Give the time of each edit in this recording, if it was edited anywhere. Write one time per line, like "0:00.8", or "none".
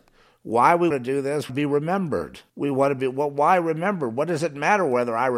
0:00.9
0:01.5
0:02.5